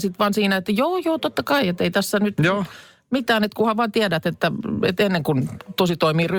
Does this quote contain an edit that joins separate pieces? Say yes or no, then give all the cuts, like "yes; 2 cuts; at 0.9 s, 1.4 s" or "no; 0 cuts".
no; 0 cuts